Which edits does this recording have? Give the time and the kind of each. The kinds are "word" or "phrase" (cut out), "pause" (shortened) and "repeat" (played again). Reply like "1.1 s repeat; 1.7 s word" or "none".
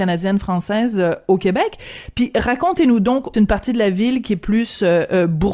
3.3 s phrase